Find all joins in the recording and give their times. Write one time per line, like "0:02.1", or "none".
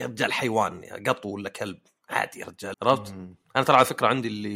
0:02.7